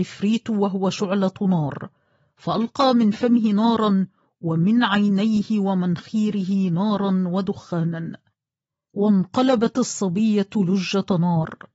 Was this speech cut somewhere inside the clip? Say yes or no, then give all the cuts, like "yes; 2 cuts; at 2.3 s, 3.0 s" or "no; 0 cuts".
no; 0 cuts